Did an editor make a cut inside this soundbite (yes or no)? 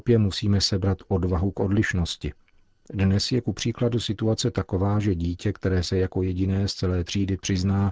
no